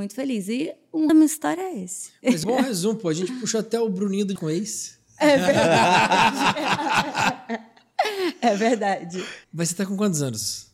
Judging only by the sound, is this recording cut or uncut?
cut